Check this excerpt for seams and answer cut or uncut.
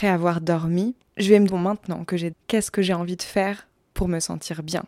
cut